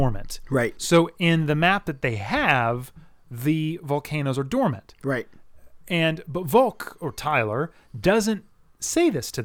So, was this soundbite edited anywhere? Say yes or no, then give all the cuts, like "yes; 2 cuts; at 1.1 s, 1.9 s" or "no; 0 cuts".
no; 0 cuts